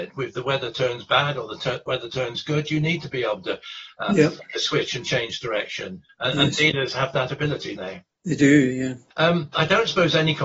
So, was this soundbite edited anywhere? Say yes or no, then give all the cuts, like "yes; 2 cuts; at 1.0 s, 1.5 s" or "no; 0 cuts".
yes; 3 cuts; at 6.1 s, 7.8 s, 9.5 s